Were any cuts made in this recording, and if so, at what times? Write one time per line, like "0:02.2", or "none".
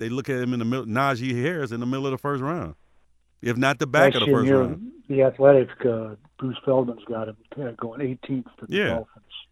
none